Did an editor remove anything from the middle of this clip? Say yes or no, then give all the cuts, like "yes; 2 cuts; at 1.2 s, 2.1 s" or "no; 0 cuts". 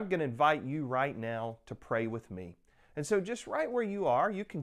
no; 0 cuts